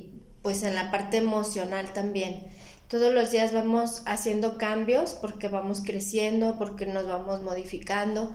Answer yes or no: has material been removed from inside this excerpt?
no